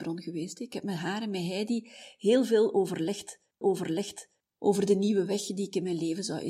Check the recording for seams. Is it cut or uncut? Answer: cut